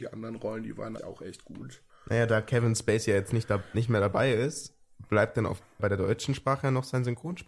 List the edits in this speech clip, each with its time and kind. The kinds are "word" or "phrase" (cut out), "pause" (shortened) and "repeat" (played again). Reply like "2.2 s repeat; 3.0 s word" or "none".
1.0 s word; 1.9 s pause; 5.8 s word